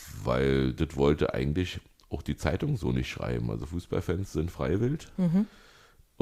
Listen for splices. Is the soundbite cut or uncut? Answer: uncut